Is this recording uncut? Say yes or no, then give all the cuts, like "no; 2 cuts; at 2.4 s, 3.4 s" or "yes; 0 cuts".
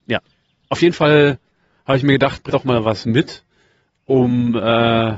no; 1 cut; at 2.5 s